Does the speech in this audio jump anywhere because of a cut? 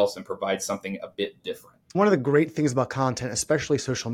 yes; 1 cut; at 1.8 s

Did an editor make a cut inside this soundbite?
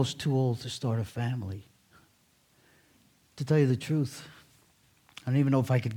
no; 0 cuts

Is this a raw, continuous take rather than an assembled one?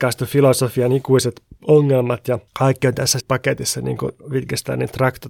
no; 3 cuts; at 1.6 s, 2.5 s, 3.2 s

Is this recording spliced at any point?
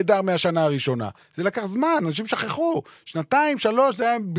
no; 0 cuts

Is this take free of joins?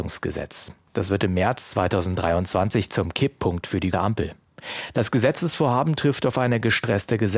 no; 1 cut; at 3.9 s

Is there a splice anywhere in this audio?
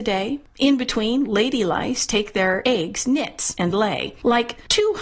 no; 0 cuts

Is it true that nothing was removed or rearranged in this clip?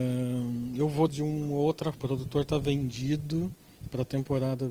no; 2 cuts; at 1.1 s, 1.9 s

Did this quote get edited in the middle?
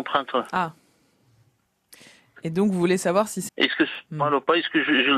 yes; 1 cut; at 3.5 s

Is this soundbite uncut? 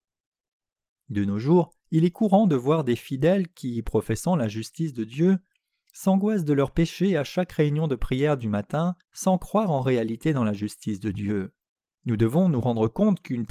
no; 3 cuts; at 1.8 s, 9.0 s, 11.8 s

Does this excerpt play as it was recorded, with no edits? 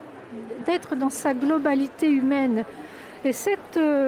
yes; 0 cuts

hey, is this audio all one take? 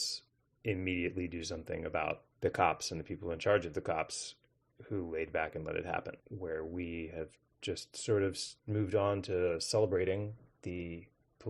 no; 3 cuts; at 2.3 s, 6.2 s, 8.6 s

